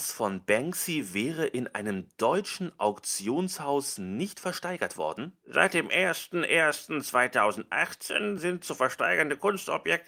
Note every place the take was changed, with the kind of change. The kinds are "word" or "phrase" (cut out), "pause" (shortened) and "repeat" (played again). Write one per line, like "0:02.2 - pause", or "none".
none